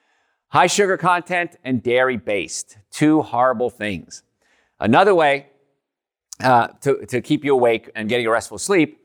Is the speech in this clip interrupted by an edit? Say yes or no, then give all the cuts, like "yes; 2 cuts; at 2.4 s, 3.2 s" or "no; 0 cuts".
no; 0 cuts